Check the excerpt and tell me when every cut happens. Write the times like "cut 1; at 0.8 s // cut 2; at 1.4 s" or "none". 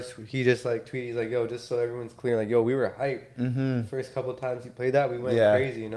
none